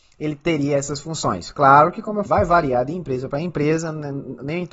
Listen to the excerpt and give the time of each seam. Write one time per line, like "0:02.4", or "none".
0:02.3